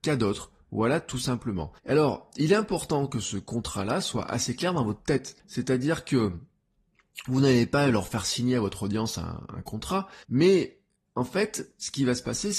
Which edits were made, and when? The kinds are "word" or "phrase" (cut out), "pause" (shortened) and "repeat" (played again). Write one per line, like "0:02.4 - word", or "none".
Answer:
0:01.8 - pause
0:05.4 - pause
0:10.2 - pause